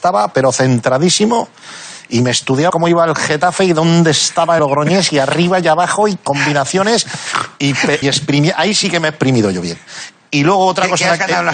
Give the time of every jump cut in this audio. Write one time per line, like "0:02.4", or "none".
0:02.7
0:04.6
0:08.0